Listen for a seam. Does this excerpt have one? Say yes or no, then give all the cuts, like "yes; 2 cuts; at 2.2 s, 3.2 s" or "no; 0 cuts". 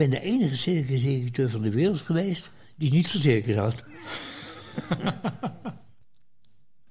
no; 0 cuts